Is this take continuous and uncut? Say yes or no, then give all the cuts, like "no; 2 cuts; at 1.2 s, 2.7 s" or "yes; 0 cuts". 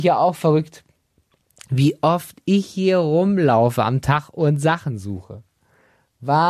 yes; 0 cuts